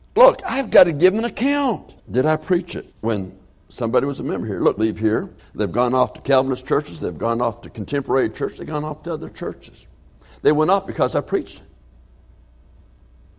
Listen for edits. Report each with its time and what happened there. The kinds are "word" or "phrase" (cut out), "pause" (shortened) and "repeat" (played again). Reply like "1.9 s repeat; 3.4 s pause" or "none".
2.0 s pause; 2.9 s pause; 4.8 s phrase; 5.4 s pause